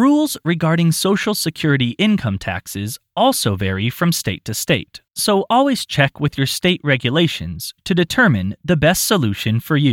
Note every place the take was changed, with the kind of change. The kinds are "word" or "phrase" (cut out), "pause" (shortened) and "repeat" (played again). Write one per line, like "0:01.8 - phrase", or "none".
0:05.1 - pause